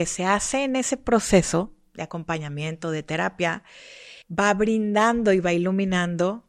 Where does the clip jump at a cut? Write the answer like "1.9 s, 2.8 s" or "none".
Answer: 4.2 s